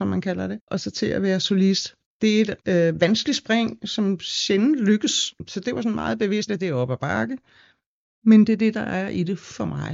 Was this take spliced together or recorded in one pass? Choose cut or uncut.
cut